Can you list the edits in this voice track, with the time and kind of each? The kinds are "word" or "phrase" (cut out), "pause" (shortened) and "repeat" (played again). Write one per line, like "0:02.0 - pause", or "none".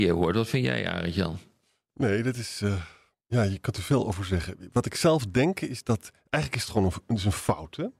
none